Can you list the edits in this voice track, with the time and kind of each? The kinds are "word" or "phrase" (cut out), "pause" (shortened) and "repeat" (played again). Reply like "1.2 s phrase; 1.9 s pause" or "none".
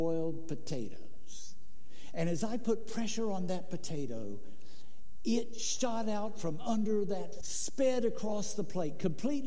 7.4 s word